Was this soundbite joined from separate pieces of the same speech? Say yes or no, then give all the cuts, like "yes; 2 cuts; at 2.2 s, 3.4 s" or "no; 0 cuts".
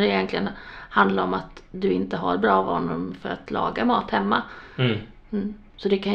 no; 0 cuts